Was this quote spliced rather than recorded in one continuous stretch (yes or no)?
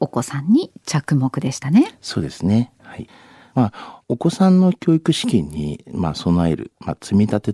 no